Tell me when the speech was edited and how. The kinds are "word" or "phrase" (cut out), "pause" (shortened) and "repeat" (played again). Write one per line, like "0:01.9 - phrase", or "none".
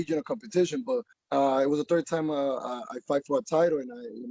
0:01.1 - pause